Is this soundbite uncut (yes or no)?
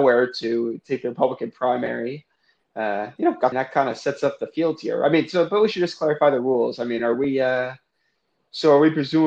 no